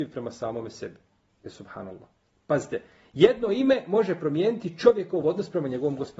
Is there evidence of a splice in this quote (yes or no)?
no